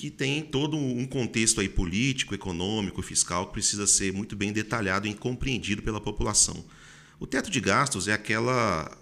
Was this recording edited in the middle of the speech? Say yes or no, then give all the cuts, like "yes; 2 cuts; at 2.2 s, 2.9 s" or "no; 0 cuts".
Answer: no; 0 cuts